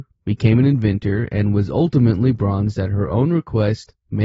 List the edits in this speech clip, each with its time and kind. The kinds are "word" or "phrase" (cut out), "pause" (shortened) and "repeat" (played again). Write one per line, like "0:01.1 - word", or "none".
none